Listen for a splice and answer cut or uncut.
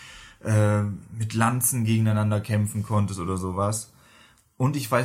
uncut